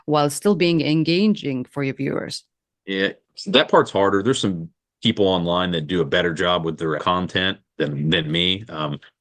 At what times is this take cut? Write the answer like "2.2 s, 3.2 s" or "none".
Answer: 7.0 s